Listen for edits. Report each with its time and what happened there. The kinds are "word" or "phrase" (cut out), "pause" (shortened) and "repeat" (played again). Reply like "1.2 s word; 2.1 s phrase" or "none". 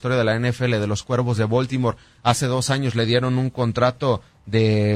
none